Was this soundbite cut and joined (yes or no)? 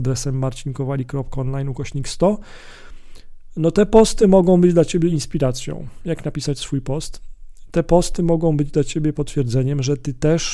no